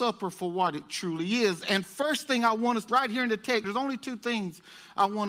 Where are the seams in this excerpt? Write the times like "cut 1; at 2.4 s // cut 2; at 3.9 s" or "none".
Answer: cut 1; at 2.9 s // cut 2; at 3.6 s